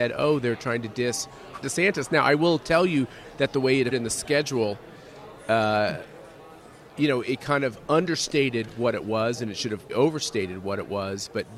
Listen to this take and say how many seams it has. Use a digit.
3